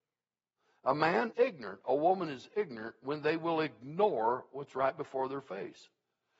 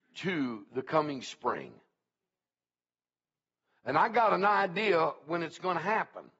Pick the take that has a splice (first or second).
first